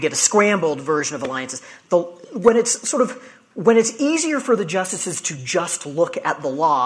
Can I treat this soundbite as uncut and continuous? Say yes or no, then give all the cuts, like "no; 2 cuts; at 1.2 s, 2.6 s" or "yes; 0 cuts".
yes; 0 cuts